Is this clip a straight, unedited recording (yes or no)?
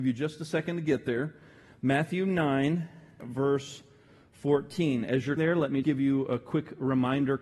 no